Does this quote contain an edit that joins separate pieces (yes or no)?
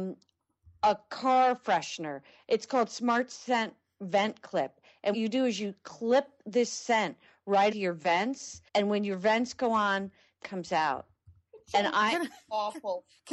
yes